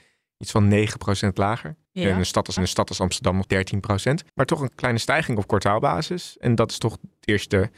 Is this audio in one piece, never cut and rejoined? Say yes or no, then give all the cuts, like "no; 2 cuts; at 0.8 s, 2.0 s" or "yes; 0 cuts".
no; 6 cuts; at 1.8 s, 2.6 s, 3.4 s, 4.3 s, 4.7 s, 6.8 s